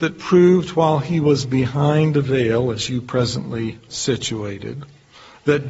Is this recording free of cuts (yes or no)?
no